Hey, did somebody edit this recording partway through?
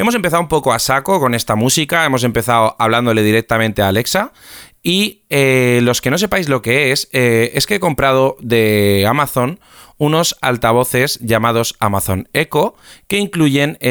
no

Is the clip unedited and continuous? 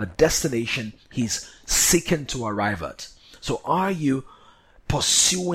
yes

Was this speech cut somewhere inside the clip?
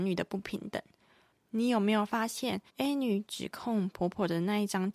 yes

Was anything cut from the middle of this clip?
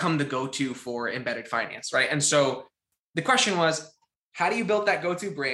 no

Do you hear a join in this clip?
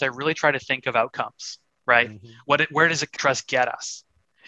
yes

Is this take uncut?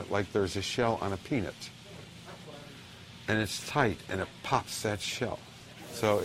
yes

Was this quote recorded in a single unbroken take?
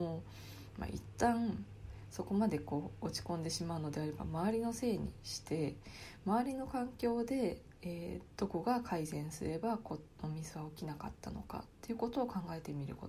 yes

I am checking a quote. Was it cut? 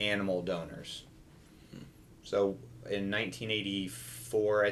no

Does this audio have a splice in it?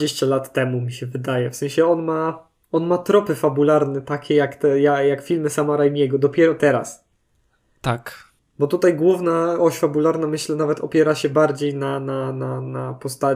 yes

